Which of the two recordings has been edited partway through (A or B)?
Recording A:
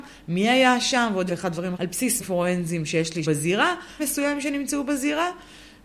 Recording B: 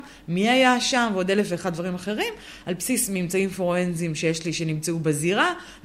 A